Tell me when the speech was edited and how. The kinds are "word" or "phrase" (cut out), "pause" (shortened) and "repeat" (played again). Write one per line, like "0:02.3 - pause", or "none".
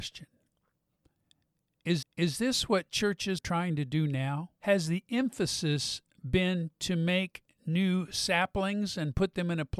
0:02.0 - repeat
0:03.4 - word
0:04.6 - pause